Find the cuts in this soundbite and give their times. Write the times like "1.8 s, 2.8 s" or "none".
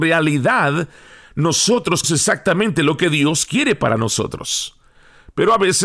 2.0 s